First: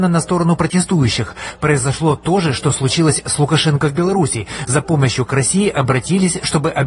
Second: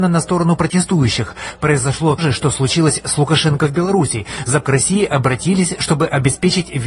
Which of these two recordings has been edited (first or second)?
second